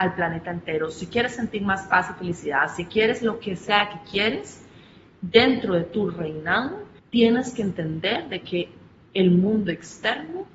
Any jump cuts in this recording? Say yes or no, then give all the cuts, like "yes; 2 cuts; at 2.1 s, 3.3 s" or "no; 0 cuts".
yes; 1 cut; at 7.0 s